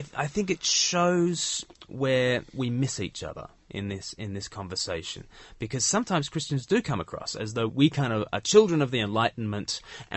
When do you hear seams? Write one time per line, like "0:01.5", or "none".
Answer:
0:07.7

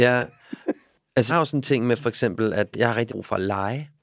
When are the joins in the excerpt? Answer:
0:01.3
0:02.7
0:03.1

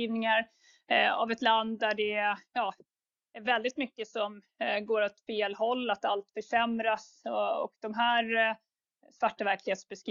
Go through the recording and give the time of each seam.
none

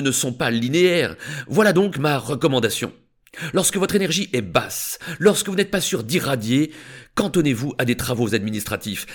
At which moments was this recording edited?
none

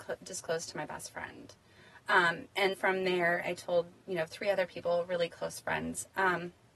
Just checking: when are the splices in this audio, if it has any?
0:02.7
0:03.4

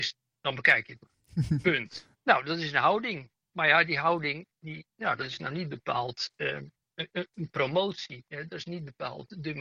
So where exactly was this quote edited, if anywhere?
0:02.1
0:04.9

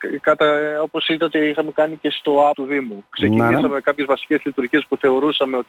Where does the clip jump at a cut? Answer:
0:02.5

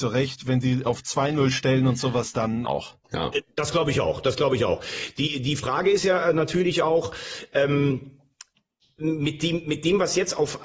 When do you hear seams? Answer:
0:02.6
0:03.0

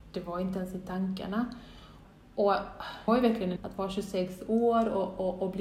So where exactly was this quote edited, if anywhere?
0:03.1
0:03.6

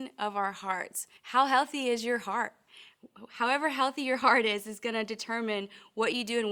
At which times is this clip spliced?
0:01.2

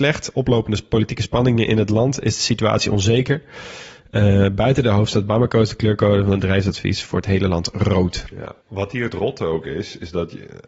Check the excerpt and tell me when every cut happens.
0:08.6

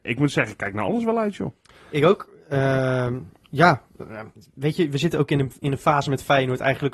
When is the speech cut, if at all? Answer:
none

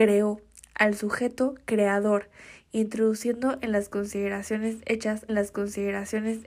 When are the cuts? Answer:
0:05.3

